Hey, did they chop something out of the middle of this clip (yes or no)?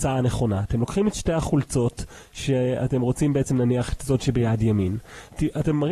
no